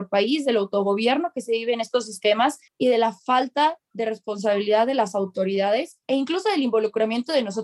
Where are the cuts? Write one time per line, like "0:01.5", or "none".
0:02.7
0:06.0